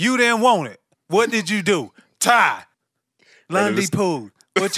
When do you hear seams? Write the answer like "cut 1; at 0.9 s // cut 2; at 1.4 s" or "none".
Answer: cut 1; at 2.7 s